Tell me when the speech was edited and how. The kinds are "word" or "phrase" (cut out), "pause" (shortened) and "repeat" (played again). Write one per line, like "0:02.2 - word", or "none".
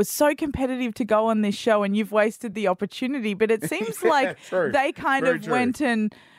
none

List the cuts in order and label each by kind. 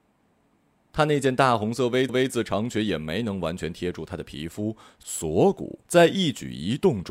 0:02.1 - repeat
0:05.8 - pause

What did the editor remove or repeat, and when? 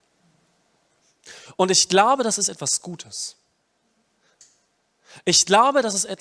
none

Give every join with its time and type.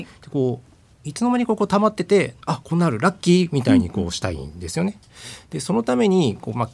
0:02.4 - pause

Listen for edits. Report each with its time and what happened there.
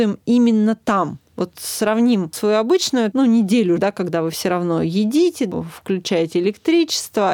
0:03.8 - word

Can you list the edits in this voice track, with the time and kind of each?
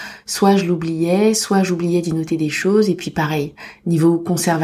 none

